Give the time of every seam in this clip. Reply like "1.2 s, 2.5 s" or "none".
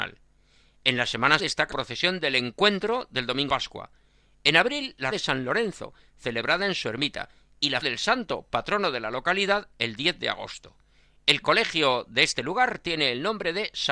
1.4 s, 1.7 s, 3.5 s, 5.1 s, 7.8 s